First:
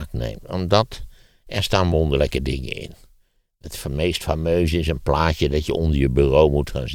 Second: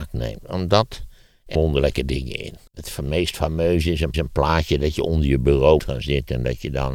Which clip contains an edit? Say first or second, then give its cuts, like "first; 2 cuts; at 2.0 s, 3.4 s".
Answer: second; 4 cuts; at 1.5 s, 2.7 s, 4.1 s, 5.8 s